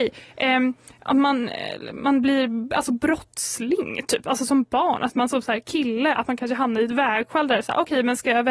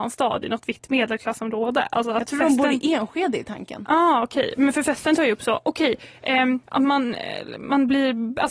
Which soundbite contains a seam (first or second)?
second